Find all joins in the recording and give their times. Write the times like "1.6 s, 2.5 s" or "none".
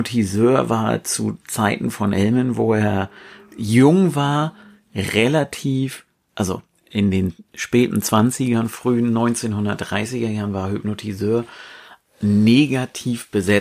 none